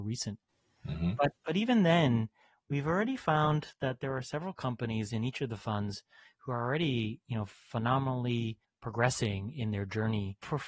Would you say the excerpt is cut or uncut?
cut